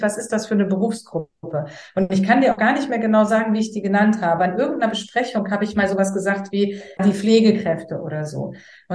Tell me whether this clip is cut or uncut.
cut